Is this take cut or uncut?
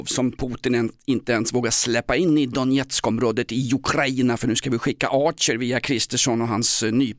uncut